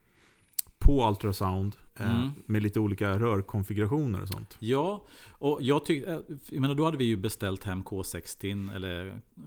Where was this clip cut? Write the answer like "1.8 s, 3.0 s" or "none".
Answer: 1.9 s, 5.6 s